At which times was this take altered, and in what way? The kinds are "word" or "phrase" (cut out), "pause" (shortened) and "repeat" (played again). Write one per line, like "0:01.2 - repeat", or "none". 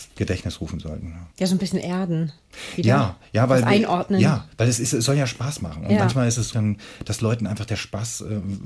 0:01.3 - pause
0:06.5 - phrase